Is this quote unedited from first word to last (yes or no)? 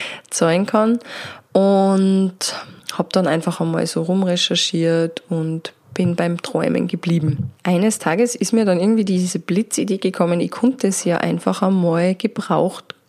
no